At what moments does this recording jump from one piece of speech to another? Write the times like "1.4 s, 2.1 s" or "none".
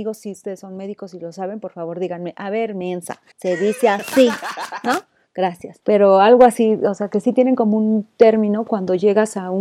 3.3 s, 5.8 s